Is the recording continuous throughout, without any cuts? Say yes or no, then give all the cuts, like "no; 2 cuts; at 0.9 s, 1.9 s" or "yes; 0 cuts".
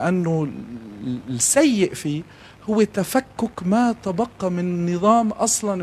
yes; 0 cuts